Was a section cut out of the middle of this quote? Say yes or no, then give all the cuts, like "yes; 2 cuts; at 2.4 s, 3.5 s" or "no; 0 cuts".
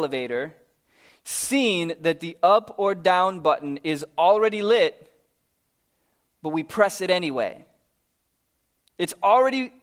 no; 0 cuts